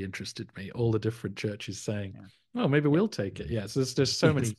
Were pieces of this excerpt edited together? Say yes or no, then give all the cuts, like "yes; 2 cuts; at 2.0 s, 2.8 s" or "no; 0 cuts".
no; 0 cuts